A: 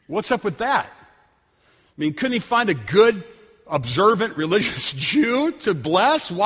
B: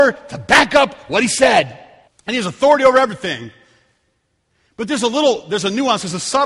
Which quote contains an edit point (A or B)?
B